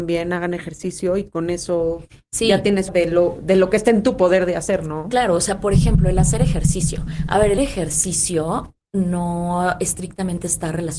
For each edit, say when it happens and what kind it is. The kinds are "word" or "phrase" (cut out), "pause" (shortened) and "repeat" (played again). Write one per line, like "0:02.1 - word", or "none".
0:02.9 - phrase
0:07.6 - word